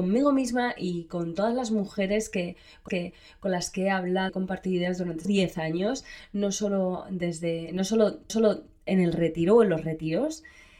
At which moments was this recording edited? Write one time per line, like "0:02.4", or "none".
0:02.9
0:04.3
0:05.2
0:08.3